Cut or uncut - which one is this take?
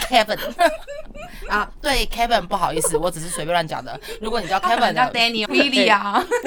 cut